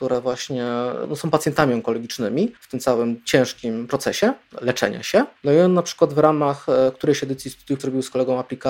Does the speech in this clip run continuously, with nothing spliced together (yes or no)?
no